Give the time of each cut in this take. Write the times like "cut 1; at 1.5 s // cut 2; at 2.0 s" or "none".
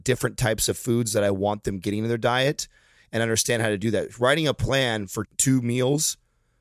cut 1; at 5.2 s